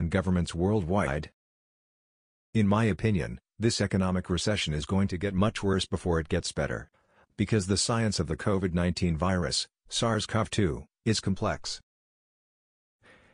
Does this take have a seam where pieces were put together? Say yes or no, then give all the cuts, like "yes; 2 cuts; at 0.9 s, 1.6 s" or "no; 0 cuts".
no; 0 cuts